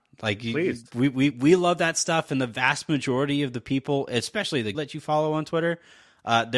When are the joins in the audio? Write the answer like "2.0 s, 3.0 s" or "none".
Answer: 1.3 s, 4.7 s